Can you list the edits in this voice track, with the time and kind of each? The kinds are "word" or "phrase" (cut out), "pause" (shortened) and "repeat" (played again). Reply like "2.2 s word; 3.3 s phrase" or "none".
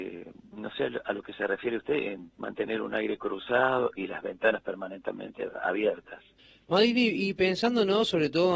2.3 s pause; 6.4 s pause